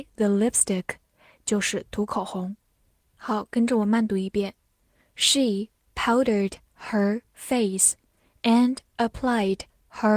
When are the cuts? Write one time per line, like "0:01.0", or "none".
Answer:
none